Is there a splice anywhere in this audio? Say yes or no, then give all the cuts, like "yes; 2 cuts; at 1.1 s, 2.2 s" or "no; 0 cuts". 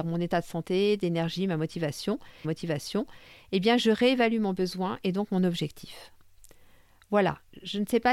yes; 1 cut; at 2.4 s